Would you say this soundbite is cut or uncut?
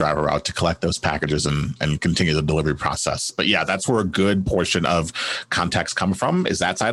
uncut